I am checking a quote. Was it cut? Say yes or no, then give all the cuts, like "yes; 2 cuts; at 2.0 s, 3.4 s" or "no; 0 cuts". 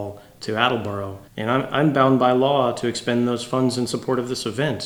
yes; 1 cut; at 1.3 s